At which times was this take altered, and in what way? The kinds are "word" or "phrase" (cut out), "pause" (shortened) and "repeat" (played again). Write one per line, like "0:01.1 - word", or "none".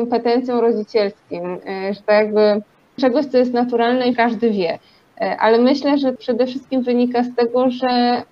0:02.0 - word
0:03.0 - word
0:04.1 - word
0:06.2 - word